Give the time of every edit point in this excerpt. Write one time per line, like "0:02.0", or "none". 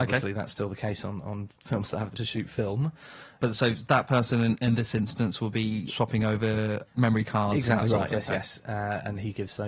0:02.1
0:05.9
0:08.1

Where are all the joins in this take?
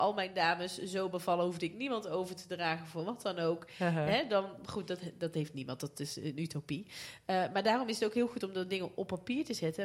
none

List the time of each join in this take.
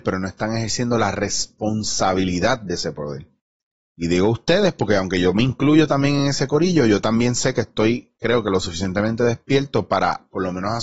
none

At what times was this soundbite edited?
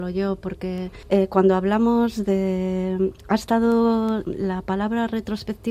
0:04.2

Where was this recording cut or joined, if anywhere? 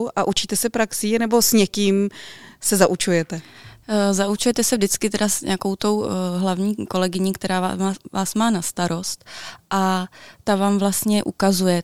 none

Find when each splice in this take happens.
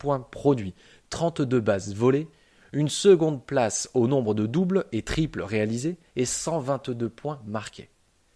none

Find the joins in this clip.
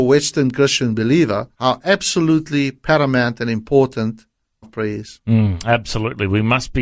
0:01.5
0:04.6

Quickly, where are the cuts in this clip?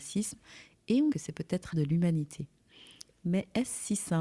0:01.1
0:01.7

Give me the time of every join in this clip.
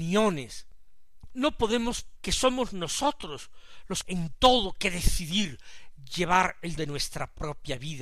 0:02.2
0:04.0
0:06.8

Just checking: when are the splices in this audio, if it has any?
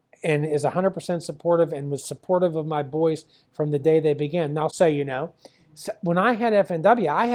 0:04.7

